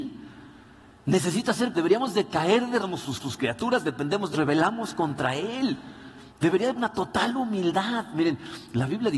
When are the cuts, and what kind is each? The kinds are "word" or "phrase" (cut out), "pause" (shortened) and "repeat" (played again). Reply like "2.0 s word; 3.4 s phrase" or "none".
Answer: 1.7 s word; 2.8 s word; 3.2 s repeat; 4.3 s phrase; 6.3 s pause; 6.8 s word

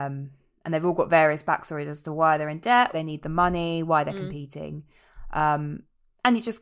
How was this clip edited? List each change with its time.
2.9 s word

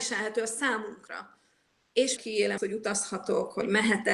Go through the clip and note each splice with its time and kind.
2.2 s word; 2.6 s word

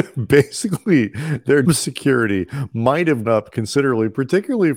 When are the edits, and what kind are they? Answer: 1.6 s word; 3.2 s word

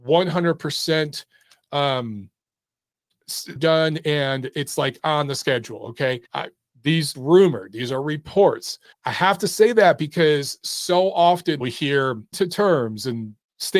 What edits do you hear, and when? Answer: 3.6 s phrase; 4.5 s word; 6.3 s pause; 7.1 s word; 8.9 s pause; 11.6 s word; 12.3 s word

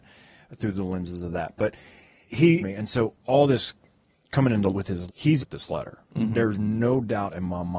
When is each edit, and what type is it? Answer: 2.2 s word; 2.6 s word; 4.7 s word; 5.1 s word; 5.4 s word

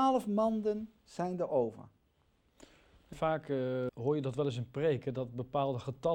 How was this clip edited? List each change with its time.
3.1 s phrase; 3.9 s word

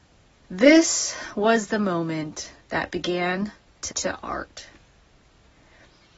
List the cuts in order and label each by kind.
2.6 s pause; 3.9 s phrase

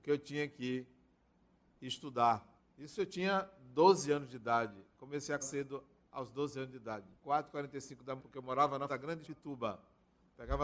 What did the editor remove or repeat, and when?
2.6 s pause; 5.4 s word; 7.2 s pause; 8.2 s word; 8.9 s word; 9.2 s phrase

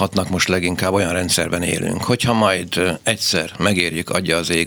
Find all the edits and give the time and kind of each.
none

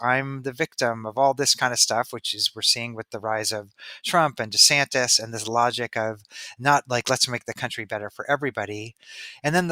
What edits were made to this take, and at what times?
none

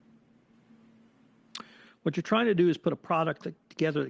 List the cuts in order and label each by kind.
none

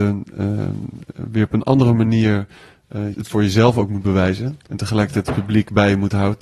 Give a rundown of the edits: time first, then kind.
3.1 s word; 4.7 s pause

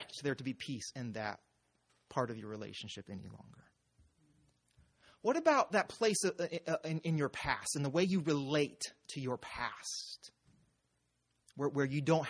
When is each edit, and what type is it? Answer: none

